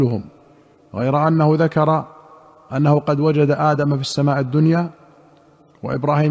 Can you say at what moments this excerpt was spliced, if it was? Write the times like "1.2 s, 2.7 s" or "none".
none